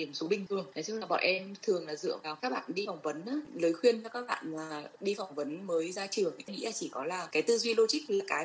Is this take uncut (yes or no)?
no